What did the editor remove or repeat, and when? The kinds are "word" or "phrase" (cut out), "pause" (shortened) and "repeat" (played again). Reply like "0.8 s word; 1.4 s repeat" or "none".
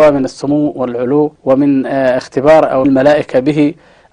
1.4 s pause; 2.8 s word